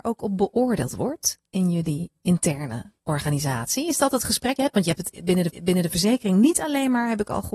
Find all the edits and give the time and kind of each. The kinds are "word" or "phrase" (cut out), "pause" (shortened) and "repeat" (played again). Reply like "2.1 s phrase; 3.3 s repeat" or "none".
3.0 s pause; 4.6 s word; 5.5 s repeat